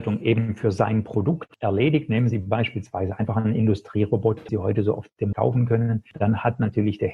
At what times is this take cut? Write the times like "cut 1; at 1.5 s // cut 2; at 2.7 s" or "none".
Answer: cut 1; at 4.5 s // cut 2; at 5.3 s